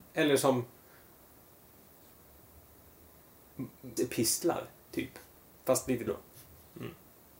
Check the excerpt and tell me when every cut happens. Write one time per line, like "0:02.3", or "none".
0:04.0
0:06.1